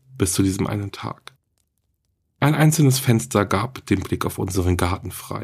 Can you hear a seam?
no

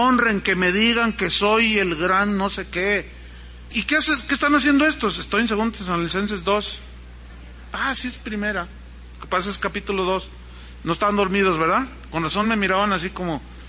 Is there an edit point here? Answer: no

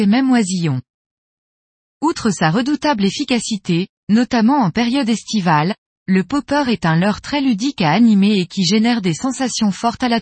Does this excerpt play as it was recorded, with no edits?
yes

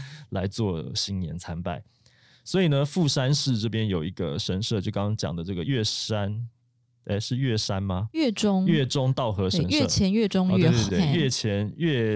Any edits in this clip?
yes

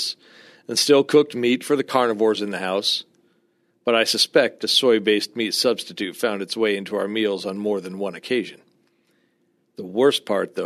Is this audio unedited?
yes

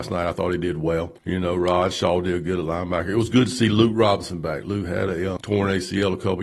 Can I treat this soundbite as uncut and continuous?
no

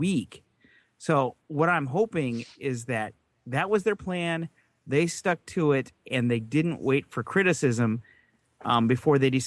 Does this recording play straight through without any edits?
yes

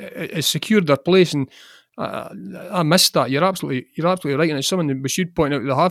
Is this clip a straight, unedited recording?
yes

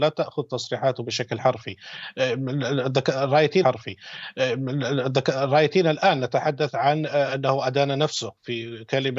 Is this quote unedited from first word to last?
no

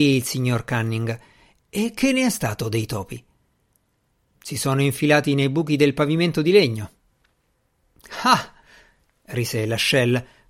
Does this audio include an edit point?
no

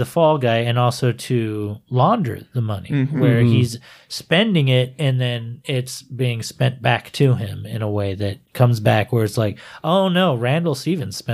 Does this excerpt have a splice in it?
no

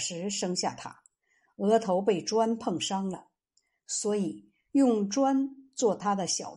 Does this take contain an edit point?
no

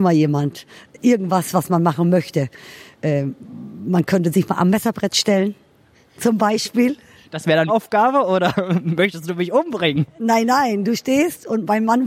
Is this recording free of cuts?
no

